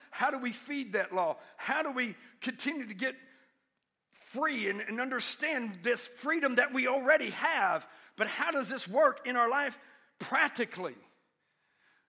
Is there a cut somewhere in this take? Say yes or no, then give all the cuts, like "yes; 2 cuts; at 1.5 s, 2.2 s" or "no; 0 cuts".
no; 0 cuts